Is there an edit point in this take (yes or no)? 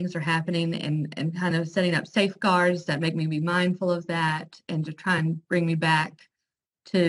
no